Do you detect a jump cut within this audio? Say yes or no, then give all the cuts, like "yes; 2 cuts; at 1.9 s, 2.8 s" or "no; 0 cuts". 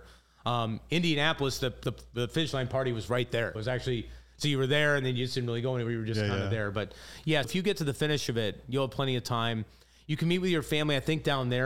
yes; 2 cuts; at 3.6 s, 7.4 s